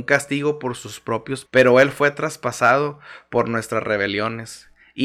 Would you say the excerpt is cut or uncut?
cut